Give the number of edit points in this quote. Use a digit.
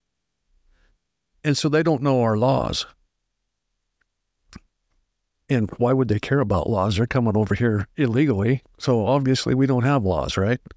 0